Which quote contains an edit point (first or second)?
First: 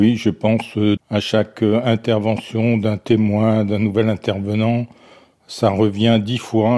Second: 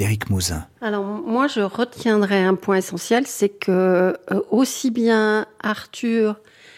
first